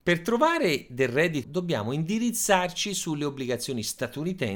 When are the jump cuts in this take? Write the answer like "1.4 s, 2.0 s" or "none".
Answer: 1.4 s